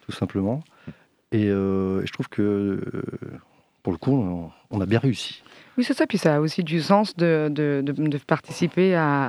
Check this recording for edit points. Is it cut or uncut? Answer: uncut